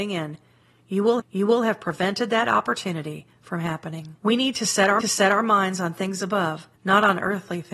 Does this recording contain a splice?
yes; 4 cuts; at 1.2 s, 4.2 s, 5.0 s, 6.8 s

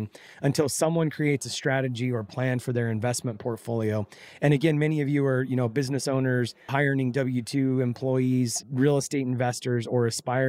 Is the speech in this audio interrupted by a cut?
yes; 2 cuts; at 6.7 s, 8.6 s

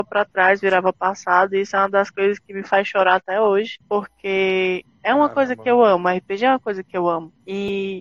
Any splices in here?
no; 0 cuts

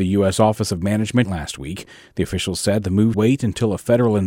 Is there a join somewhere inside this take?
yes; 2 cuts; at 1.2 s, 3.1 s

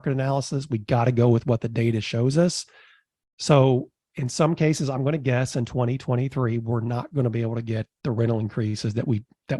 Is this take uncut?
yes; 0 cuts

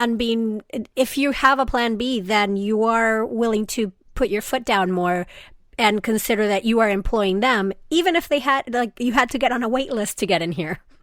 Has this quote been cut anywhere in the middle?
no; 0 cuts

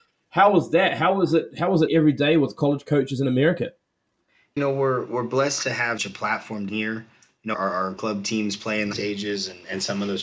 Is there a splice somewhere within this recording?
yes; 7 cuts; at 1.9 s, 4.6 s, 6.0 s, 6.7 s, 7.5 s, 8.0 s, 8.9 s

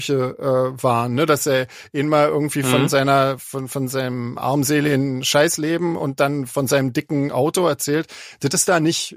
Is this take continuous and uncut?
yes; 0 cuts

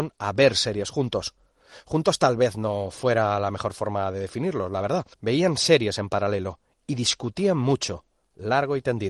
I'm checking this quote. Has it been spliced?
yes; 1 cut; at 5.1 s

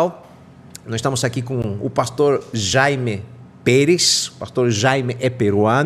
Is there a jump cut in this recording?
no; 0 cuts

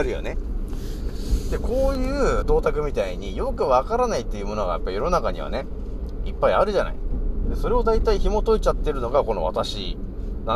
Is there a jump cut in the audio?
yes; 1 cut; at 2.4 s

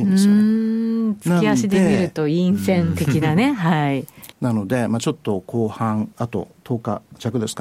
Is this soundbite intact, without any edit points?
no; 2 cuts; at 4.3 s, 6.1 s

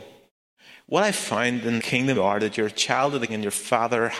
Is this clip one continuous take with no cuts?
no; 3 cuts; at 1.8 s, 2.1 s, 3.3 s

